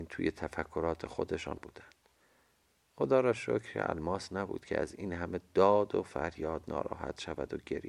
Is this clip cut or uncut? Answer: cut